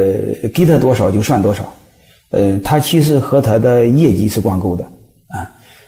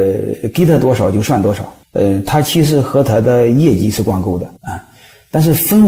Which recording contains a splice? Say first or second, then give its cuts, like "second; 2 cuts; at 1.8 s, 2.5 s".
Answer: second; 2 cuts; at 1.8 s, 4.6 s